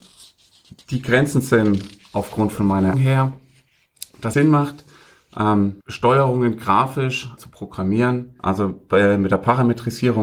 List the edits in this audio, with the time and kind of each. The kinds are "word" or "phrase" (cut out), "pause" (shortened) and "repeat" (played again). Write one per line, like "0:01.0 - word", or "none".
0:02.9 - word
0:04.3 - word
0:05.8 - pause
0:07.4 - word
0:08.4 - pause